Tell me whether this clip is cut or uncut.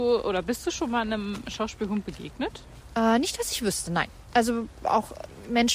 uncut